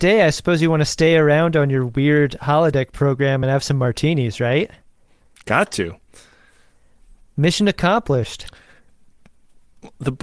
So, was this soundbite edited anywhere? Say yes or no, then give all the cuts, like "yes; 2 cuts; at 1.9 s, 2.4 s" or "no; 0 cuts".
no; 0 cuts